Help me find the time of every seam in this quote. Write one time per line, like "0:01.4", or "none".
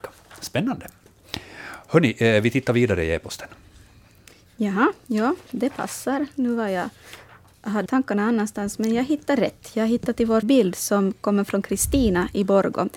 0:07.9
0:10.4